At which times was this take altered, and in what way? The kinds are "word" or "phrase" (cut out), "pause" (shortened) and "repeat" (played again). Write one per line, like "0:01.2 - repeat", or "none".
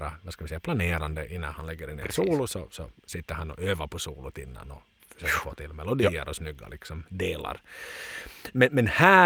none